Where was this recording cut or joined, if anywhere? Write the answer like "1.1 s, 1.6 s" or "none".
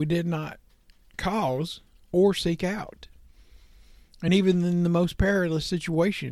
none